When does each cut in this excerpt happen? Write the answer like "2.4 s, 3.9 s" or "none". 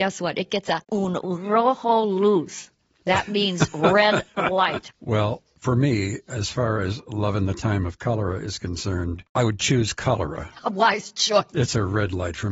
none